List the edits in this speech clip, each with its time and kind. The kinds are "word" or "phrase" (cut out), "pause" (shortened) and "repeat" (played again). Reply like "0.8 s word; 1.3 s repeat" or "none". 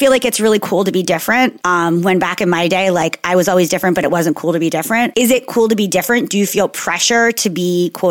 none